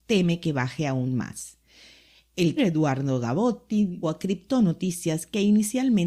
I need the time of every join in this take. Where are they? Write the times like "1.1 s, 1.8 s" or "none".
2.6 s, 4.0 s